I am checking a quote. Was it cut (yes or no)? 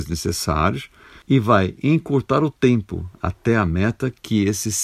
no